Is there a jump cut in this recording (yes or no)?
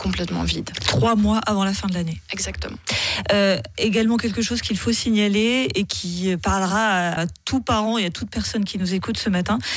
yes